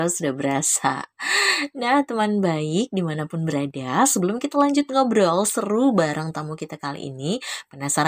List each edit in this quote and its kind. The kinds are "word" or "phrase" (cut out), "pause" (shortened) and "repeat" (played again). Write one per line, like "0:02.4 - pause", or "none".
none